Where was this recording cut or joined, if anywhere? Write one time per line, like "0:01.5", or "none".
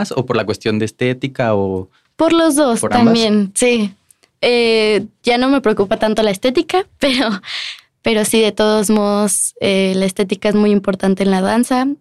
none